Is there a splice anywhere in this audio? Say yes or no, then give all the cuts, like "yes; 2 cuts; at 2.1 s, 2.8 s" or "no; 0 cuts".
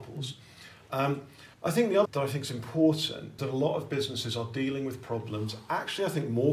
yes; 3 cuts; at 1.5 s, 2.0 s, 3.4 s